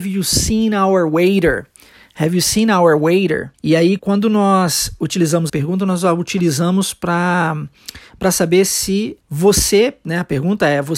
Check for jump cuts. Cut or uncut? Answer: cut